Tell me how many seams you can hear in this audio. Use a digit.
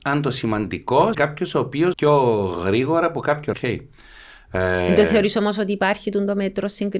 3